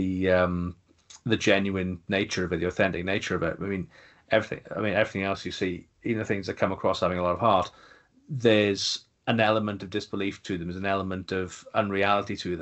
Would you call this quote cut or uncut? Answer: uncut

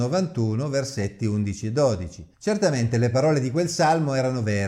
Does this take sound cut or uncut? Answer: cut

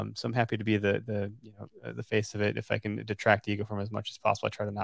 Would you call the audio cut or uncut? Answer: uncut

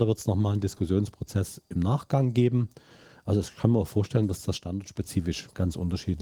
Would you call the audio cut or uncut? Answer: uncut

